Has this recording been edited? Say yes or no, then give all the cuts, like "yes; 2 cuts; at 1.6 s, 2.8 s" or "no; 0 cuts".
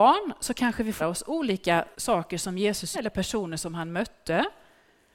yes; 3 cuts; at 1.0 s, 1.9 s, 2.9 s